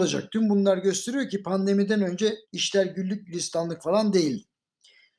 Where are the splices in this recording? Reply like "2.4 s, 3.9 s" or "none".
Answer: 2.4 s

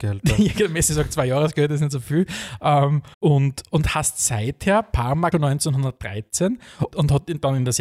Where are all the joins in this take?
3.1 s, 5.3 s, 6.9 s

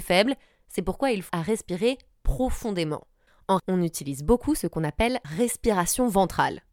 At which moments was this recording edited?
1.3 s, 3.6 s, 5.2 s

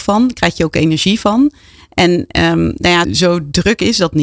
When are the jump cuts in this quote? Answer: 3.0 s

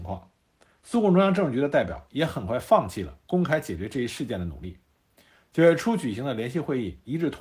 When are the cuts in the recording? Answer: none

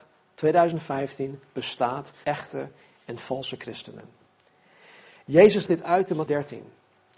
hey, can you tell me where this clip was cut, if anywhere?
2.2 s, 5.7 s, 6.3 s

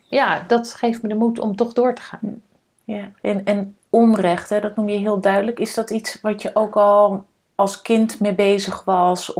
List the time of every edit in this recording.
3.2 s

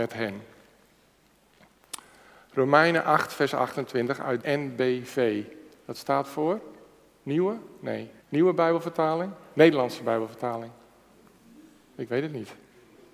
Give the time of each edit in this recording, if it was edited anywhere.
4.4 s, 8.2 s

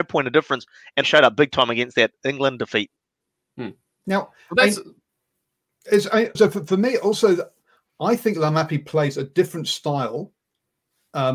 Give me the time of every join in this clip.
1.0 s, 6.3 s

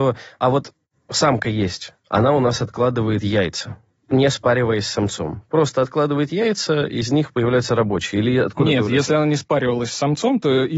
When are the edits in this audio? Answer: none

